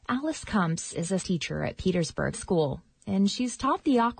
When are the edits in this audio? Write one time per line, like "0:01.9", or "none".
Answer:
0:01.2
0:02.3